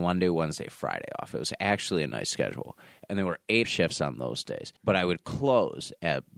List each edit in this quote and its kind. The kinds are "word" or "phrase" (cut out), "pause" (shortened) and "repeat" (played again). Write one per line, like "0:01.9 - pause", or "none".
0:03.6 - word
0:04.8 - pause